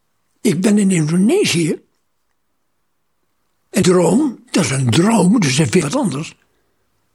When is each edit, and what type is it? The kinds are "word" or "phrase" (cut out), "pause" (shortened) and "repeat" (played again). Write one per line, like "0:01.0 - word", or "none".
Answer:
0:03.8 - word
0:04.7 - word
0:05.8 - word

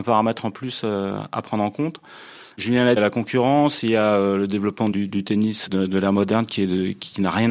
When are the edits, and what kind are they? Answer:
0:03.0 - phrase
0:04.9 - word
0:05.7 - word

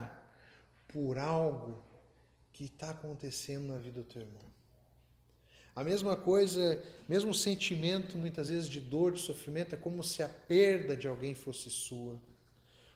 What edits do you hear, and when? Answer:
none

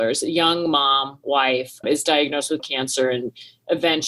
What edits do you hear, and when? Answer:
0:01.8 - word
0:02.6 - word

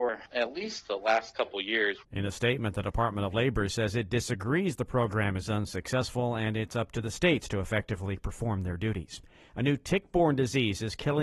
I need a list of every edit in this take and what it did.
none

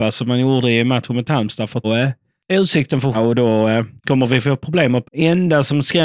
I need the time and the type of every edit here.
0:01.8 - word
0:02.4 - pause
0:03.1 - word
0:04.0 - pause
0:05.0 - phrase

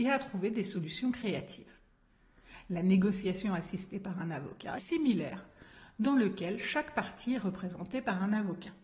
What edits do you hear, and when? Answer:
0:04.8 - phrase

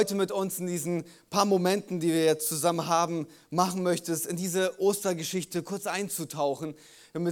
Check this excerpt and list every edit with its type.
none

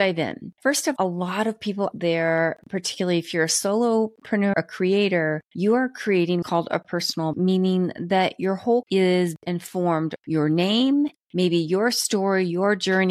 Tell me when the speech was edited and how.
0:01.0 - word
0:01.9 - word
0:04.5 - word
0:06.4 - word
0:07.3 - word
0:08.8 - word
0:09.4 - word
0:10.2 - word

